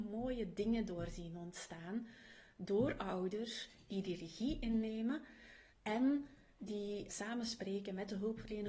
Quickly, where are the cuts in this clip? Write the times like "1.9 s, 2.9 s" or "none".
5.7 s, 7.1 s